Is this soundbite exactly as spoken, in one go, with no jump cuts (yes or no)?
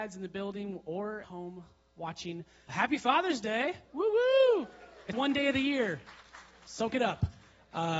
no